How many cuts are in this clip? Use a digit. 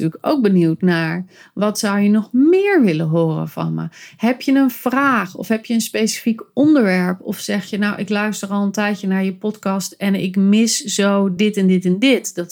0